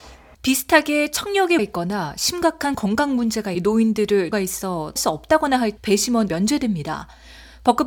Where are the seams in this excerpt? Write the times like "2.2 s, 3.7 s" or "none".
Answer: 1.6 s, 3.5 s, 4.3 s, 5.0 s, 5.8 s, 6.3 s